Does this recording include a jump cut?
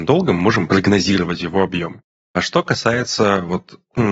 no; 0 cuts

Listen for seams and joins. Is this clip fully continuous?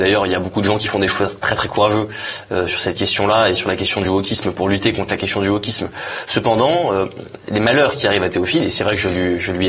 yes; 0 cuts

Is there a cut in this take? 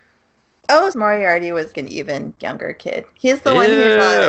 yes; 2 cuts; at 0.9 s, 1.7 s

